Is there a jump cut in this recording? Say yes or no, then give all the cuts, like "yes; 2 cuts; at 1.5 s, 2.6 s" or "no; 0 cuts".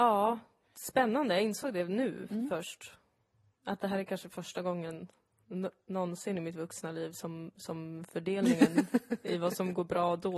no; 0 cuts